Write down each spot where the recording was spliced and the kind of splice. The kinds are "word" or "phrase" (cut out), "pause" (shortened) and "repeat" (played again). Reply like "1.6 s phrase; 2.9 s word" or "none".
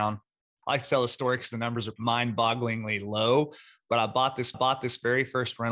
2.0 s word; 4.5 s repeat